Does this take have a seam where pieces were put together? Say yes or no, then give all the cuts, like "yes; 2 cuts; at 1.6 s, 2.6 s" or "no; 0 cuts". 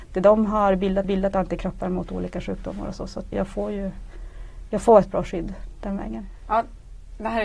yes; 2 cuts; at 1.0 s, 3.3 s